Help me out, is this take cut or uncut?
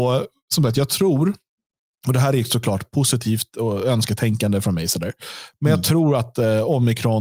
uncut